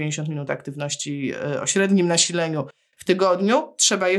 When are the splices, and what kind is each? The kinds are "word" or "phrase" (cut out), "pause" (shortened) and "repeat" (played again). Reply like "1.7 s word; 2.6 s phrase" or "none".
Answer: none

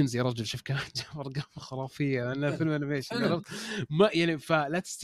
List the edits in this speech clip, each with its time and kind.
none

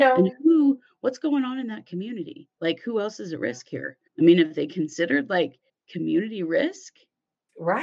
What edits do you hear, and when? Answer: 4.1 s pause; 5.7 s pause

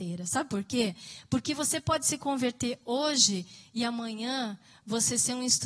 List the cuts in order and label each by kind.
none

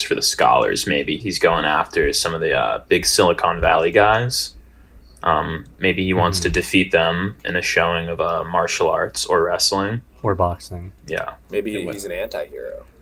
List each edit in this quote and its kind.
1.2 s word; 11.4 s pause

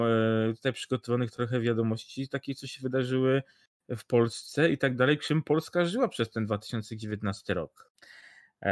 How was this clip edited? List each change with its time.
none

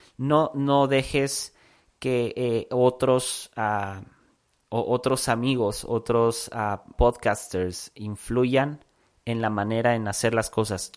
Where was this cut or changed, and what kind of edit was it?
6.9 s word

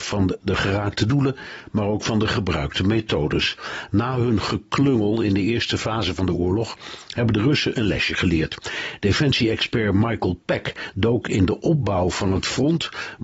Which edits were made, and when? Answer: none

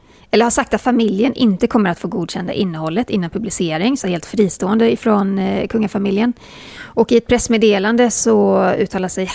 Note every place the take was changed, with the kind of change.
4.0 s phrase

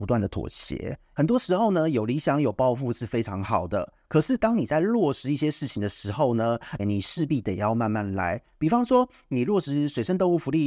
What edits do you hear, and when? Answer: 6.8 s word

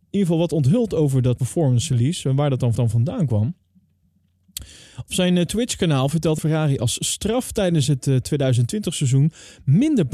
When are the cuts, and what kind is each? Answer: 1.4 s word; 2.8 s repeat; 6.4 s phrase

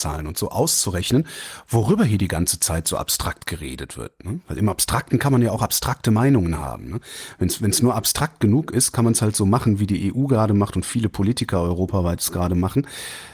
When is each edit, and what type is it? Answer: none

